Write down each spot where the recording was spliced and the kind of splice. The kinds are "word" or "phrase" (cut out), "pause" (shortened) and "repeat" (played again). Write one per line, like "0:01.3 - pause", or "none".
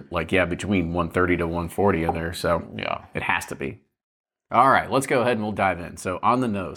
none